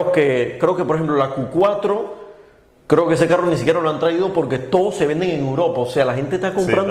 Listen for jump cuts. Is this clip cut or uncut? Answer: uncut